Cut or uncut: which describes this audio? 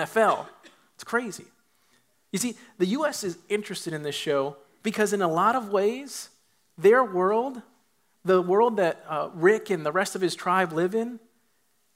uncut